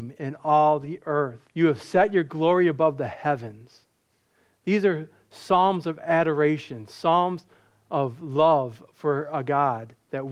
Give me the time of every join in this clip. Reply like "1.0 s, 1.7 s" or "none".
1.5 s